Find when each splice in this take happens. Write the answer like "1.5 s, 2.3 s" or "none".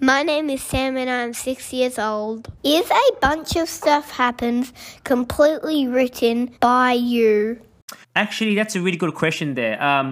2.6 s, 6.6 s, 8.0 s